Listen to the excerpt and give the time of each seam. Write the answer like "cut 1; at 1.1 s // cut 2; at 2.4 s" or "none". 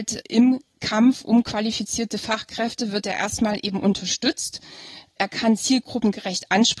none